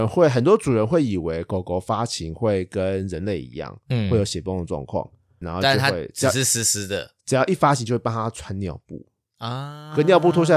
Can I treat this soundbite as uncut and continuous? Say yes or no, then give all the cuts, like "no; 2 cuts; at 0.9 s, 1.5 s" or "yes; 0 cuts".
no; 1 cut; at 5.4 s